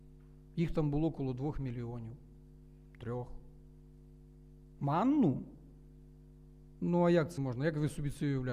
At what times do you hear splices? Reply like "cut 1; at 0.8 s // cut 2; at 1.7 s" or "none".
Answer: cut 1; at 7.4 s